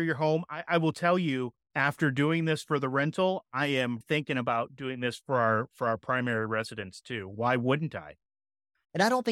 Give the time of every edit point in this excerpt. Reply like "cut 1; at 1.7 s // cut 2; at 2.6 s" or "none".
cut 1; at 4.0 s